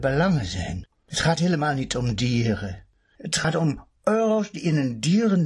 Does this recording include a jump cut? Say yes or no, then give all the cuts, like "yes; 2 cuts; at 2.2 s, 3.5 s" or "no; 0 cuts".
no; 0 cuts